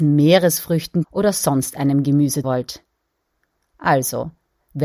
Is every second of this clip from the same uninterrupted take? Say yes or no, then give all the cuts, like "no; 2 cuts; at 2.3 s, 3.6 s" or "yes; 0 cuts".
no; 2 cuts; at 1.0 s, 2.4 s